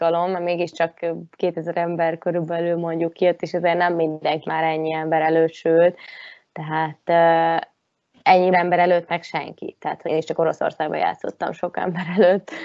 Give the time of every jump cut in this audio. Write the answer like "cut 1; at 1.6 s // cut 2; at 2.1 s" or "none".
cut 1; at 4.4 s // cut 2; at 8.5 s // cut 3; at 10.1 s